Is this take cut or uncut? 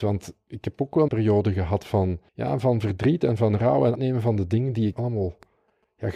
cut